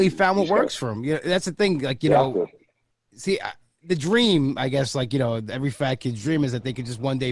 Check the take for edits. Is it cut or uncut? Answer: uncut